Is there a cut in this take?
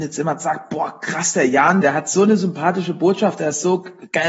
yes; 1 cut; at 1.8 s

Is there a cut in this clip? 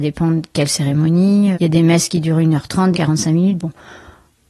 yes; 2 cuts; at 1.5 s, 2.9 s

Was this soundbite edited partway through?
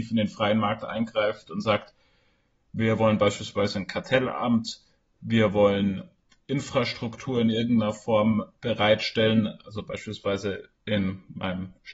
no; 0 cuts

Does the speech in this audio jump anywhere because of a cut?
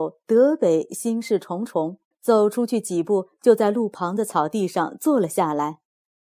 yes; 1 cut; at 2.1 s

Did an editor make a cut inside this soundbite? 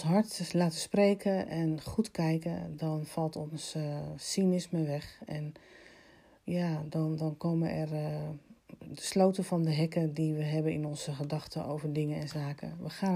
no; 0 cuts

